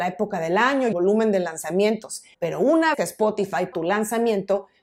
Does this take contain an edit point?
yes; 4 cuts; at 0.9 s, 2.3 s, 2.9 s, 3.7 s

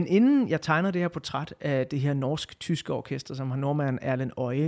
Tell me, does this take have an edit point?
no; 0 cuts

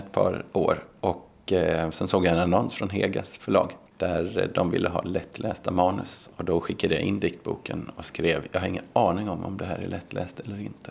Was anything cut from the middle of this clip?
no; 0 cuts

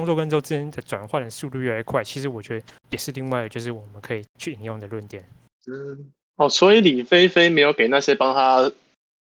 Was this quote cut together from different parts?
yes; 2 cuts; at 4.3 s, 6.2 s

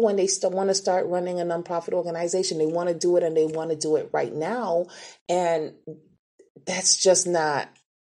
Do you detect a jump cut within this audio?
no; 0 cuts

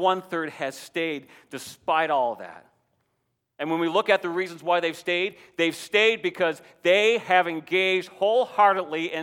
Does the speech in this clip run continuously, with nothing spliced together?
yes; 0 cuts

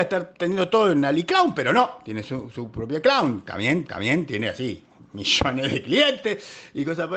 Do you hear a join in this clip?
yes; 1 cut; at 3.9 s

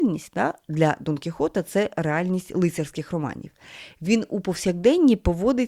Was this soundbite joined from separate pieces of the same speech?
no; 0 cuts

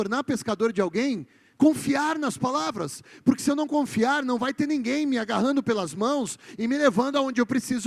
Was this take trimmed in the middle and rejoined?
no; 0 cuts

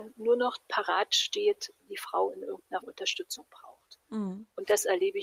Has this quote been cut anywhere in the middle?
yes; 2 cuts; at 1.9 s, 2.8 s

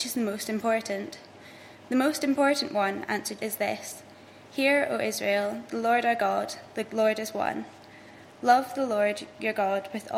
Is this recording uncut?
no; 1 cut; at 3.4 s

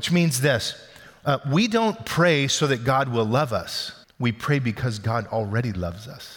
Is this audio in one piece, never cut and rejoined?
no; 1 cut; at 4.0 s

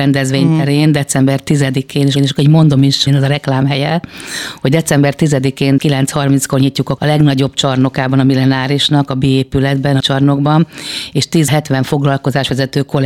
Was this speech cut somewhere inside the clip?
yes; 6 cuts; at 2.2 s, 3.1 s, 5.8 s, 7.0 s, 10.0 s, 11.5 s

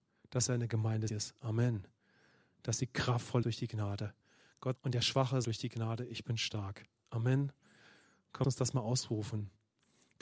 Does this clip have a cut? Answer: yes; 5 cuts; at 1.1 s, 3.4 s, 4.8 s, 5.4 s, 8.4 s

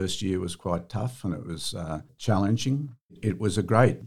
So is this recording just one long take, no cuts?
yes; 0 cuts

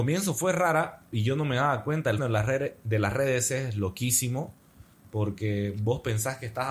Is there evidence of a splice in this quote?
yes; 2 cuts; at 1.1 s, 2.2 s

